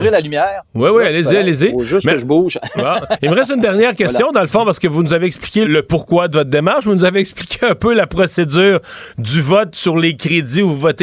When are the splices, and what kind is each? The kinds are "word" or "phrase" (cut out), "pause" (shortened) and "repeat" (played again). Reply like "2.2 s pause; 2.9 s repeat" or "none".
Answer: 5.6 s word